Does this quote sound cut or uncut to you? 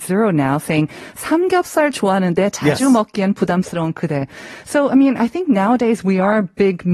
uncut